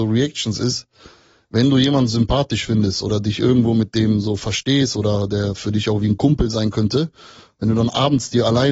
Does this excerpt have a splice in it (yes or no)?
no